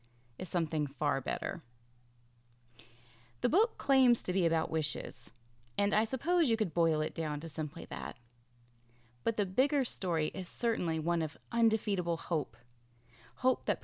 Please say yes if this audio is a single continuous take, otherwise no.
yes